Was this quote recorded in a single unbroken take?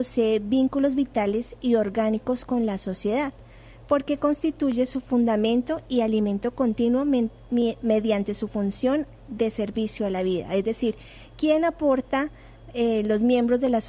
yes; 0 cuts

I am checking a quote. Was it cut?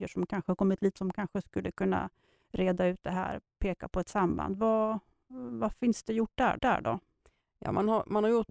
yes; 2 cuts; at 1.0 s, 6.6 s

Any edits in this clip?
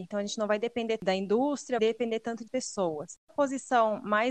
yes; 4 cuts; at 1.0 s, 1.8 s, 2.5 s, 3.3 s

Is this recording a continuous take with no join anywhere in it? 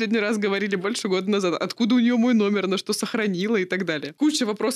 yes; 0 cuts

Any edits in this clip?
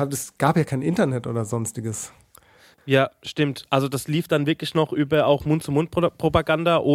no; 0 cuts

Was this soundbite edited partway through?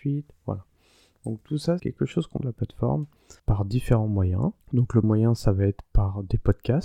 yes; 5 cuts; at 1.8 s, 2.4 s, 3.4 s, 4.6 s, 5.0 s

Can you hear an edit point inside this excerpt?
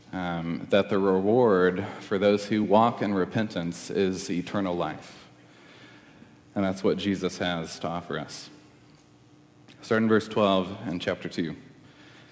no; 0 cuts

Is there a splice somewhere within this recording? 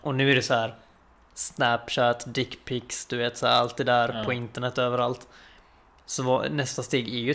no; 0 cuts

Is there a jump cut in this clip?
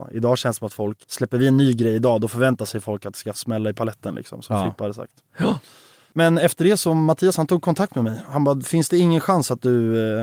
yes; 2 cuts; at 1.0 s, 3.3 s

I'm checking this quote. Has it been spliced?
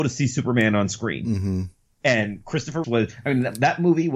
yes; 1 cut; at 2.8 s

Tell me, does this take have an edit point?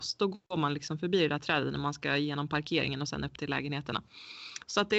no; 0 cuts

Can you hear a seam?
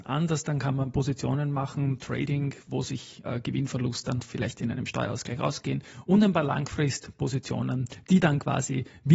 yes; 1 cut; at 4.2 s

